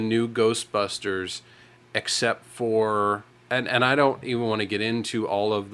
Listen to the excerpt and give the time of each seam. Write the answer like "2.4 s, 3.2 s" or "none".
none